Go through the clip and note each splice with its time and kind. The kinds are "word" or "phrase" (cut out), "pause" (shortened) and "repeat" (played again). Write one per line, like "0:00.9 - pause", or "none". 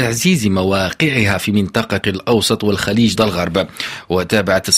0:02.0 - word
0:03.2 - word